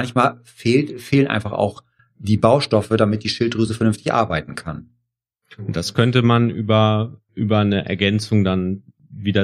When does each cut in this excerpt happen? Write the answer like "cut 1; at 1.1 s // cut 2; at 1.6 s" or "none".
none

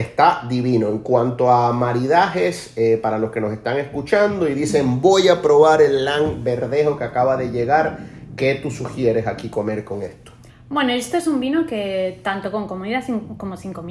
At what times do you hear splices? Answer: cut 1; at 10.5 s

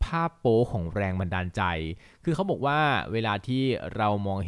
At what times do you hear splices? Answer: none

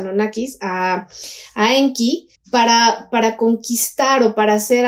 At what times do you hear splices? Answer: cut 1; at 2.4 s

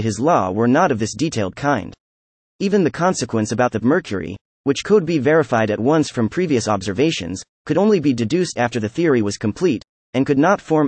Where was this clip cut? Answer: cut 1; at 3.8 s

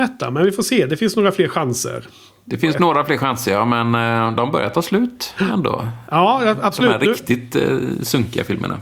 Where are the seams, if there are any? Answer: none

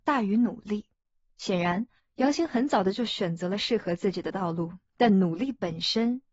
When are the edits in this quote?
cut 1; at 0.9 s // cut 2; at 2.0 s

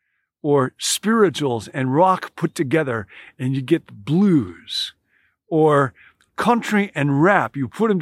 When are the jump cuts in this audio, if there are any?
none

